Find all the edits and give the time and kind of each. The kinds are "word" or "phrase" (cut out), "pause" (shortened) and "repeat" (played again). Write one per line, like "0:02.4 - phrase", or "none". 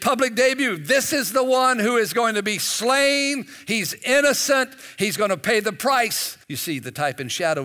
0:06.4 - pause